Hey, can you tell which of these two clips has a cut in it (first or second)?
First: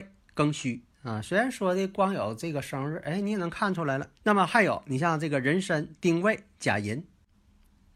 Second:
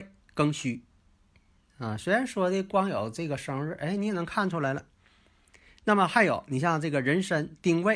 first